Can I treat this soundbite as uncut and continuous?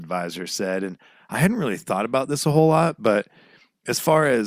yes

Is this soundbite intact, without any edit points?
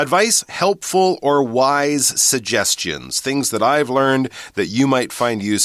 yes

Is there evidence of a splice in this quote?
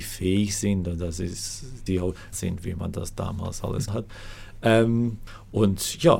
yes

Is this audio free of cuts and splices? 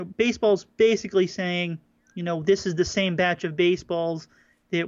yes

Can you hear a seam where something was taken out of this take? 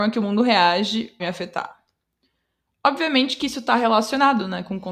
yes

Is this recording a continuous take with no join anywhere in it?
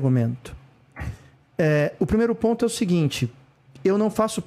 yes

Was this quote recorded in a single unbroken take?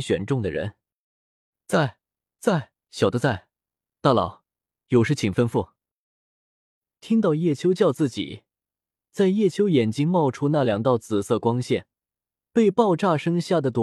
no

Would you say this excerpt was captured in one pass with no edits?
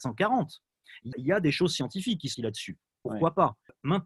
no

